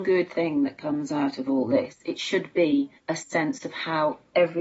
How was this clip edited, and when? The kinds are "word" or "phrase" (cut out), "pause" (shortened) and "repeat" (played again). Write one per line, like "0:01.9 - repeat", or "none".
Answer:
0:03.0 - pause

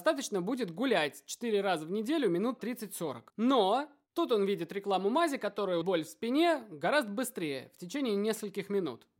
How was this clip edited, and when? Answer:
0:02.6 - word
0:03.3 - pause
0:05.8 - word

